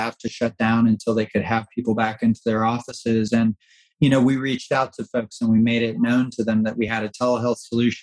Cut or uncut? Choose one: uncut